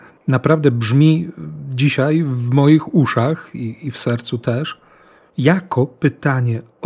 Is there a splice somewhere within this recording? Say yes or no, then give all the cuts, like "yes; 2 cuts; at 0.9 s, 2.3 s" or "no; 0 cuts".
no; 0 cuts